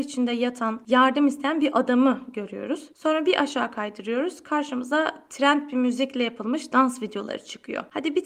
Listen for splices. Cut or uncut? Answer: uncut